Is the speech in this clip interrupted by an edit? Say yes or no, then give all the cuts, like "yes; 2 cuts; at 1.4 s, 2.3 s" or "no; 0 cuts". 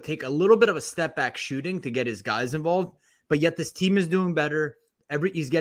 no; 0 cuts